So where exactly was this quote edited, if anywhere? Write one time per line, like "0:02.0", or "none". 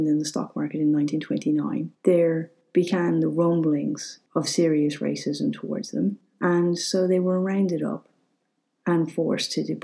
0:02.0
0:04.3